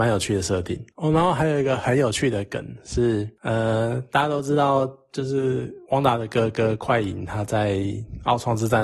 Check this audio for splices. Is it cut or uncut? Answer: cut